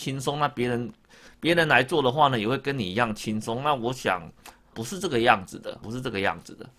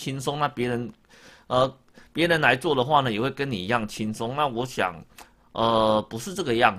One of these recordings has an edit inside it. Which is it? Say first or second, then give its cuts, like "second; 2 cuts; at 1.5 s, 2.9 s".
first; 3 cuts; at 1.3 s, 4.7 s, 5.8 s